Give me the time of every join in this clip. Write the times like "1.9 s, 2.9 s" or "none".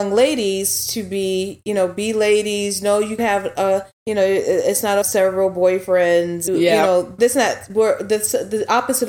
3.2 s, 3.9 s, 5.0 s, 6.5 s, 7.2 s